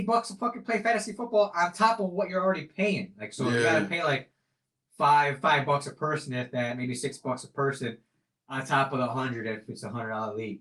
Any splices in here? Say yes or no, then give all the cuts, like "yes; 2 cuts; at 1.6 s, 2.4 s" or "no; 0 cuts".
no; 0 cuts